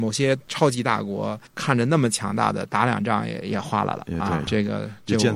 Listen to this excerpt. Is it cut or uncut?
cut